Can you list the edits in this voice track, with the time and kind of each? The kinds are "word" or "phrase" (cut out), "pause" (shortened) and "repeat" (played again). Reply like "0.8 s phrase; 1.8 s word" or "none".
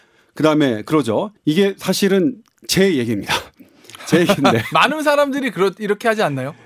1.4 s pause